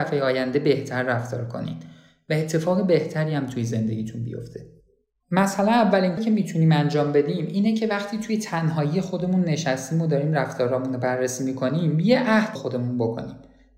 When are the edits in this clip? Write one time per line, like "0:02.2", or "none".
0:06.2
0:12.6